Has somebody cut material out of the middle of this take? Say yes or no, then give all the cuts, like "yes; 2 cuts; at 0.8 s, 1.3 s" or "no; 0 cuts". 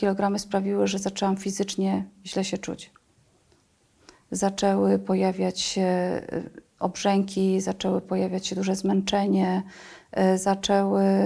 no; 0 cuts